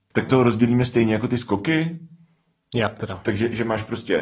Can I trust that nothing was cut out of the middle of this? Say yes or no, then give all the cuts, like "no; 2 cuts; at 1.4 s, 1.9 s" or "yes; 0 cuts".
yes; 0 cuts